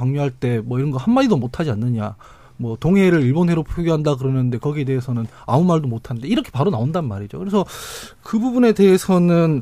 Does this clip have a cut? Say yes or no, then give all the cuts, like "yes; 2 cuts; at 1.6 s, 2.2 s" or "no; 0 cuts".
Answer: no; 0 cuts